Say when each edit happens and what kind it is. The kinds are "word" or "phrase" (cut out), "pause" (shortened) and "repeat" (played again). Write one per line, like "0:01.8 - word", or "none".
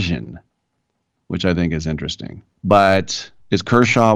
0:02.5 - pause